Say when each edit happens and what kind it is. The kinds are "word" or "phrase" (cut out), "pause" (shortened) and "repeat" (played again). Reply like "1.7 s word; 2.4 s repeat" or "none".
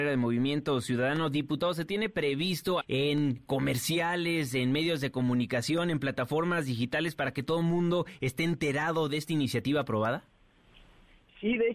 2.8 s phrase